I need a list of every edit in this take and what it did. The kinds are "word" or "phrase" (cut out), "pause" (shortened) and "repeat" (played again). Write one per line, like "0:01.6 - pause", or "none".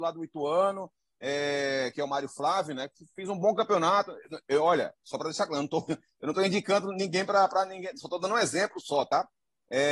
none

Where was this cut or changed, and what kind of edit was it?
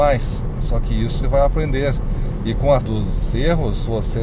0:01.2 - word
0:02.8 - word

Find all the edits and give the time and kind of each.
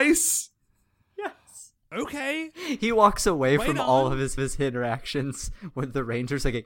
0:04.4 - repeat

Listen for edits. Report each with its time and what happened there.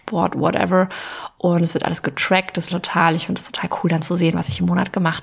0:02.7 - phrase

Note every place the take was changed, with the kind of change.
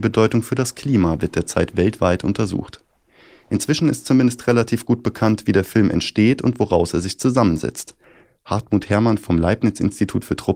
none

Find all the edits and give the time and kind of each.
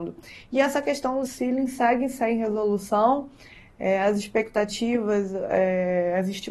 0:01.2 - word

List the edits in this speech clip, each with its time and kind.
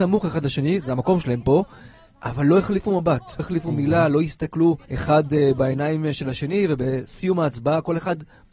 0:03.4 - word
0:04.8 - pause

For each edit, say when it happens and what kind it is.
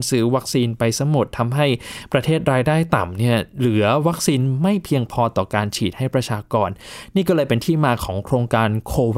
none

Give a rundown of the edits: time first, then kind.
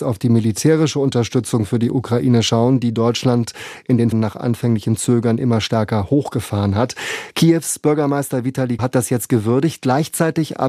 0:04.1 - phrase
0:08.8 - word

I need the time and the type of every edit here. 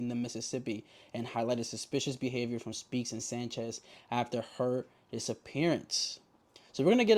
none

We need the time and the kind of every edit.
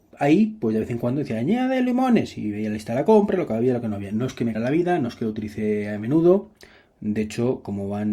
0:04.5 - word

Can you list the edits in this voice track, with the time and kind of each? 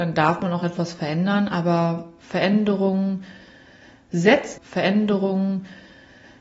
0:04.6 - repeat

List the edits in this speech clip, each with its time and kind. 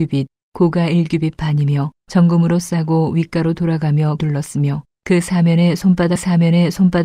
0:02.0 - pause
0:04.2 - word
0:04.9 - pause
0:06.2 - repeat

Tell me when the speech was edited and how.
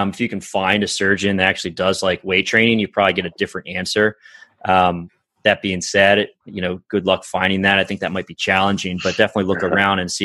none

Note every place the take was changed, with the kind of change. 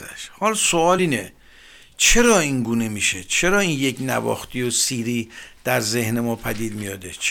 none

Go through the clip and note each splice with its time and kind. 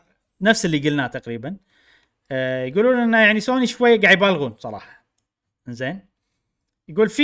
none

